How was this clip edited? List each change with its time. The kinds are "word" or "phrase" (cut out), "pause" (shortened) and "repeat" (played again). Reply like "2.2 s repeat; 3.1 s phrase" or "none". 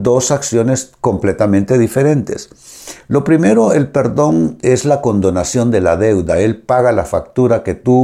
none